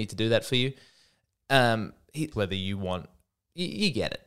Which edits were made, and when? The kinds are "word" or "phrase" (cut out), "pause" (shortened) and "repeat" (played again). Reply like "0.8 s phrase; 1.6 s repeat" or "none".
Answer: 2.3 s phrase